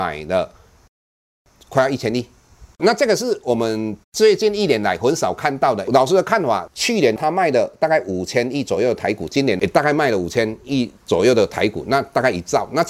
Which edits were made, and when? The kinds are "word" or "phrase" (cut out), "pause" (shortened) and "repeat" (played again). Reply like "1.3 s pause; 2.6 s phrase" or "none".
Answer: 2.7 s pause; 4.0 s pause; 11.0 s pause

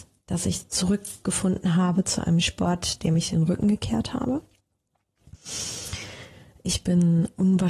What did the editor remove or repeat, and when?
none

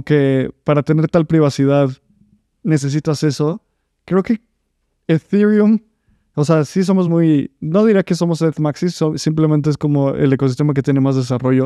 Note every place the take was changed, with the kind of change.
none

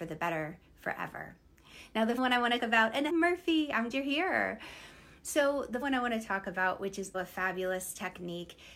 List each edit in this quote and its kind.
2.2 s word; 2.6 s word; 3.1 s word; 3.9 s word; 5.8 s word; 7.1 s word

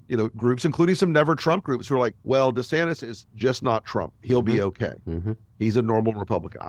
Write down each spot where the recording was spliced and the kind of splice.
2.2 s pause

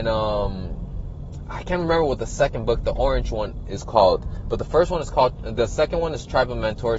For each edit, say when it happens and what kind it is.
none

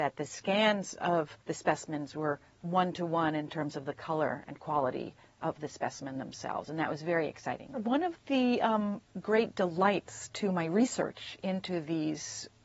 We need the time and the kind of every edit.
1.4 s pause

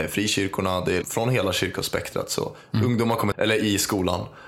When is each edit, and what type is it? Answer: 1.0 s word; 3.3 s phrase

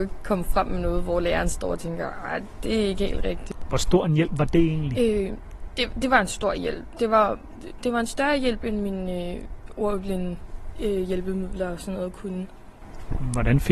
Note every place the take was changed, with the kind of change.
none

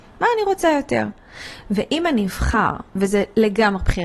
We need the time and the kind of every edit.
none

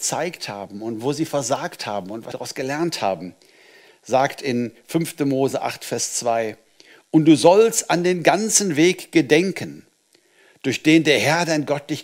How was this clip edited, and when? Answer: 2.3 s word

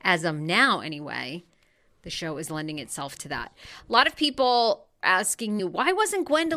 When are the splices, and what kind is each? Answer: 5.0 s word; 5.6 s word

